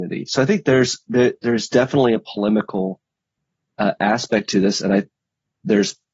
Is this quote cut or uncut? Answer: uncut